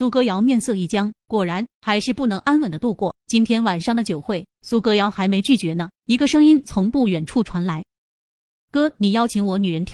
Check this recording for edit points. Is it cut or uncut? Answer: cut